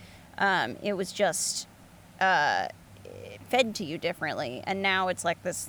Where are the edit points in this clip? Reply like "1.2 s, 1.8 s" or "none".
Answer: none

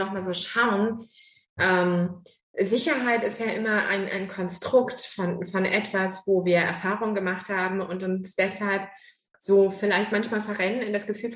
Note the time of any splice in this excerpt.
none

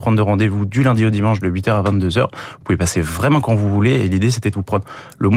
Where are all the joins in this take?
none

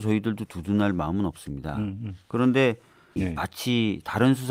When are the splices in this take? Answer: 3.2 s

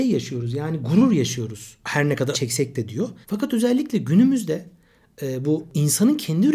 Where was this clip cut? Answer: 2.3 s, 3.2 s

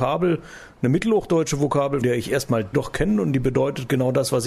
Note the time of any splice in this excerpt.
2.0 s, 2.7 s

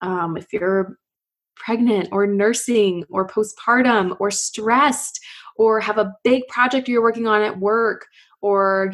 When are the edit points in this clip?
none

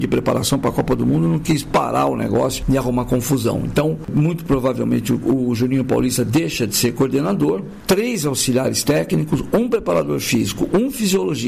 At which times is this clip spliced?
none

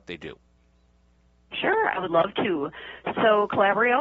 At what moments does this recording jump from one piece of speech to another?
none

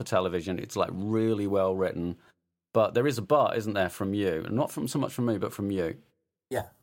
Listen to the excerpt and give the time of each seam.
none

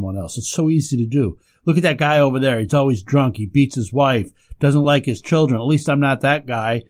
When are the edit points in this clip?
none

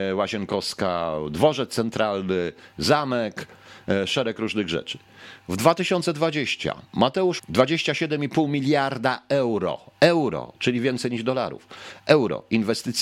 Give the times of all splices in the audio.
7.4 s

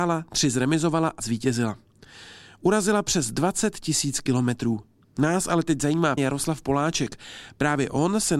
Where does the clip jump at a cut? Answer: 1.2 s, 6.2 s

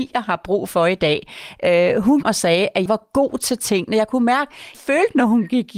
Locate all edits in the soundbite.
2.2 s, 2.9 s, 4.7 s

